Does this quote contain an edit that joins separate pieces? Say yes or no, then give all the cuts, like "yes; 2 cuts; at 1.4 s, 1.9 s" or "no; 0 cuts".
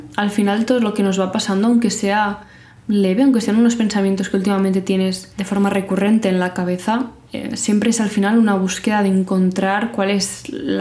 no; 0 cuts